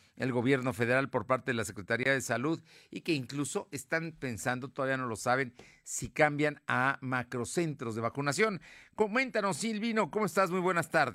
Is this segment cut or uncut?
uncut